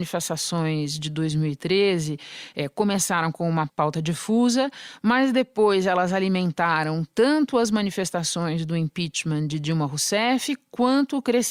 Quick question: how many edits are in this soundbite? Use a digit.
1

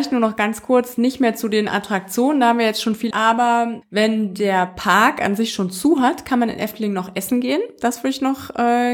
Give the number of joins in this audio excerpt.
2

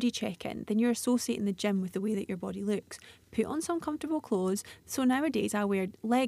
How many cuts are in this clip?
0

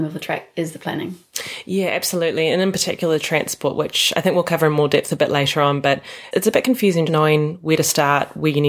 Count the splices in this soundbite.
2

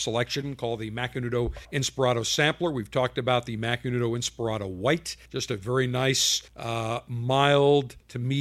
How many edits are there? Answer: 3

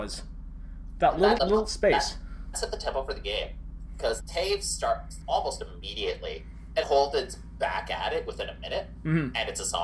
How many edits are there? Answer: 5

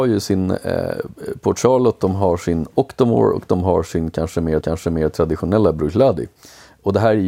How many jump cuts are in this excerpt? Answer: 1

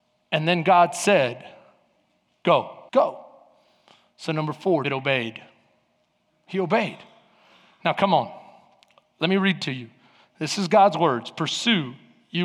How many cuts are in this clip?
2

